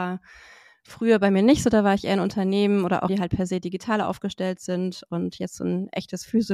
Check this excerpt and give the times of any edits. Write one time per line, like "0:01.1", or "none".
0:03.1